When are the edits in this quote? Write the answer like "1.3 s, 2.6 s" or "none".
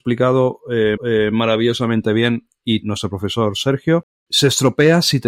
1.0 s, 2.8 s, 4.1 s